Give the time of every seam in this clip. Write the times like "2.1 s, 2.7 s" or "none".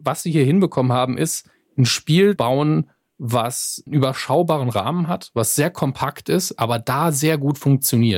2.4 s, 3.9 s